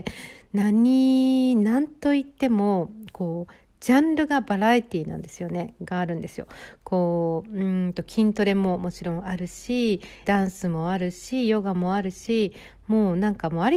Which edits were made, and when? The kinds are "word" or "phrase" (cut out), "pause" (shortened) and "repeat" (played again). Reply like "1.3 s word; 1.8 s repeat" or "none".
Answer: 10.2 s phrase